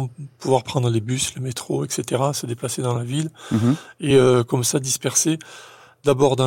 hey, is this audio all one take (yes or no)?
yes